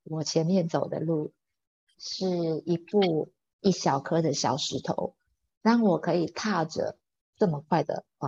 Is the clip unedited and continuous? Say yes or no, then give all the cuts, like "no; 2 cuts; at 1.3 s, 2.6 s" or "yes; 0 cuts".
yes; 0 cuts